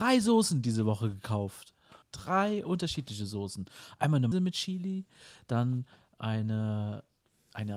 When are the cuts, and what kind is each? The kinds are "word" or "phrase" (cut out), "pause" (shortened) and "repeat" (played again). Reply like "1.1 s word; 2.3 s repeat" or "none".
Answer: 2.0 s pause; 4.3 s word